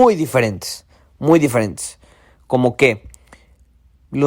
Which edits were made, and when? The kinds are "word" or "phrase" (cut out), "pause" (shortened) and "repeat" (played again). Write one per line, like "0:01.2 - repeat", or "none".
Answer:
none

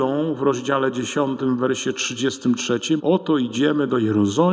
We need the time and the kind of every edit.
0:03.0 - word

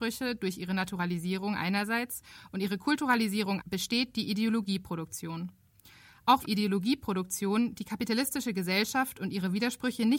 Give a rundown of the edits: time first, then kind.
0:03.6 - word
0:06.4 - phrase

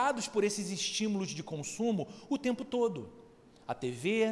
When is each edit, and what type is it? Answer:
none

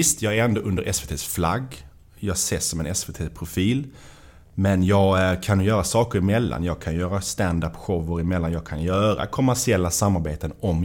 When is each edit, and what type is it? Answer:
none

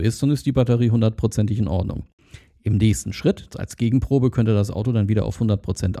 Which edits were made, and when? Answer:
none

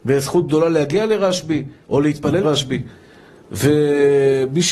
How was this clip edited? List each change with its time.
0:01.8 - pause
0:02.4 - phrase

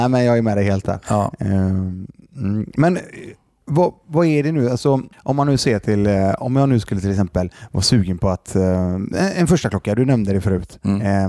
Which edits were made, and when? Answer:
0:05.1 - pause

